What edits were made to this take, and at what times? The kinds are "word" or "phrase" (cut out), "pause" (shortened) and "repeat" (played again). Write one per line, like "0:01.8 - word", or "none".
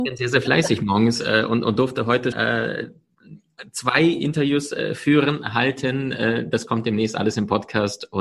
0:02.3 - word